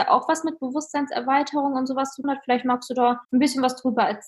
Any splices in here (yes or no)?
yes